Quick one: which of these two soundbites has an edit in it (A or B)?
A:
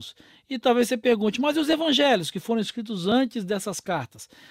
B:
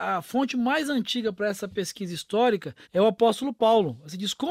B